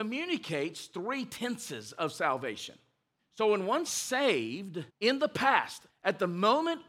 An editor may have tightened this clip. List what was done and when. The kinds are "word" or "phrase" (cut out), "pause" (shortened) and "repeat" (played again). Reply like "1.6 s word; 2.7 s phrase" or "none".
3.2 s pause; 3.9 s phrase; 4.9 s pause; 5.9 s word